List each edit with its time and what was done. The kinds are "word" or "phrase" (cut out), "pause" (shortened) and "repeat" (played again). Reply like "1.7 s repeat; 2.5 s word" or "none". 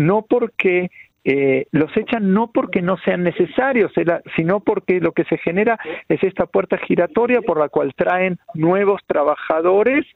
8.4 s pause